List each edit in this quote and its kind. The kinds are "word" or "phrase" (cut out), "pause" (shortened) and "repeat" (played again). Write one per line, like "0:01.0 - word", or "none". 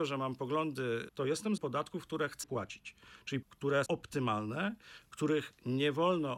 0:01.1 - word
0:01.6 - word
0:02.4 - word
0:03.4 - word
0:03.9 - word